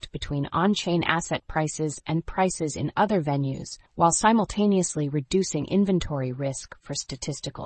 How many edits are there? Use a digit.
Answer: 1